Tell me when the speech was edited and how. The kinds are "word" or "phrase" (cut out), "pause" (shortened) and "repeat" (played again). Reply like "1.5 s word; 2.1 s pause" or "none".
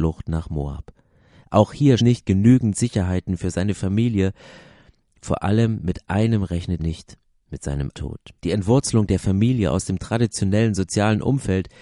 2.0 s phrase; 6.8 s word; 7.9 s word; 8.4 s pause

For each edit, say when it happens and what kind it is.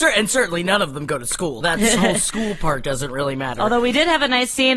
1.6 s word

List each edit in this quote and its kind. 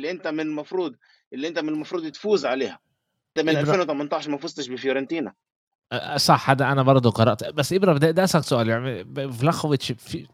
3.4 s word; 7.4 s word

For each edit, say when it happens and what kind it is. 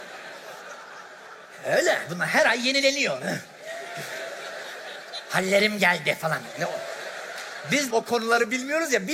7.9 s phrase

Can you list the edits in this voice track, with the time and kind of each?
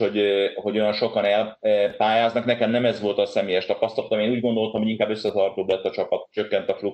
none

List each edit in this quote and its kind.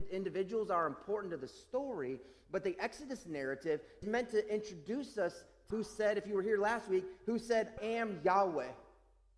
4.0 s word; 5.7 s phrase; 7.8 s word

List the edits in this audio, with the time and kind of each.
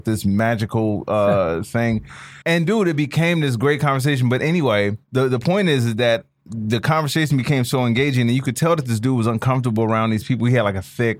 2.4 s pause; 5.0 s pause

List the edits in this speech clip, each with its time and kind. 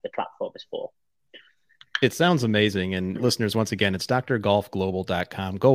3.2 s word

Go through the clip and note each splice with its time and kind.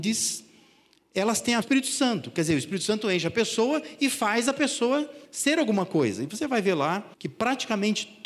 1.6 s phrase; 5.3 s pause; 7.1 s pause

